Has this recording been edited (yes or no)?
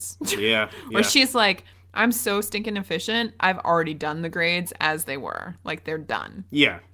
no